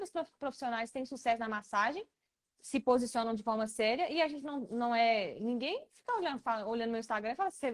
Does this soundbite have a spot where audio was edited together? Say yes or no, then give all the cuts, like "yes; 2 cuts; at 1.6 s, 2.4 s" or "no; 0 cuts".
no; 0 cuts